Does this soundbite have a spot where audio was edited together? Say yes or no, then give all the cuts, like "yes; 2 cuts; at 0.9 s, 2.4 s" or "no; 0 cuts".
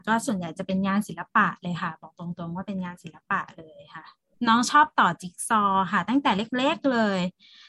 yes; 1 cut; at 4.3 s